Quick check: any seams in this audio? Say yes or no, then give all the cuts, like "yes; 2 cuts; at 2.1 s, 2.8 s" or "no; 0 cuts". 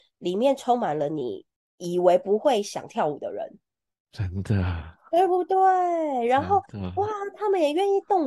no; 0 cuts